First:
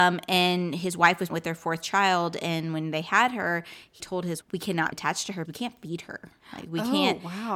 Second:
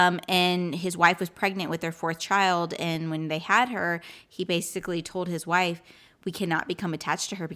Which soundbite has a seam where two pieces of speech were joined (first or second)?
first